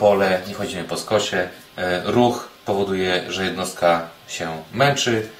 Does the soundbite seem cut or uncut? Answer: cut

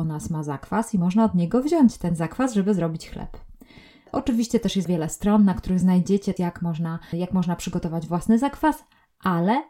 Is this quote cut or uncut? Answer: cut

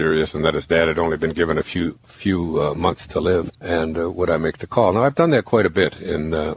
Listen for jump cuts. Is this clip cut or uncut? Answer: cut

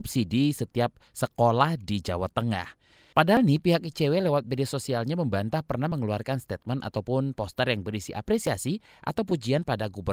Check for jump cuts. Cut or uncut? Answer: uncut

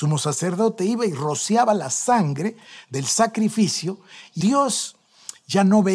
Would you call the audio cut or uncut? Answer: cut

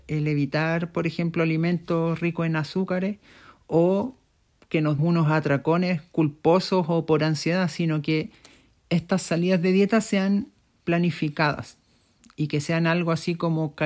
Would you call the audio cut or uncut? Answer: cut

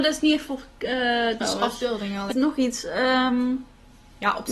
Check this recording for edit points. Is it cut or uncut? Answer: cut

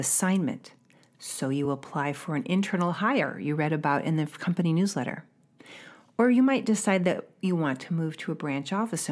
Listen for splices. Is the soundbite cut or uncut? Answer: uncut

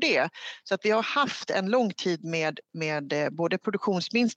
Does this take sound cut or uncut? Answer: uncut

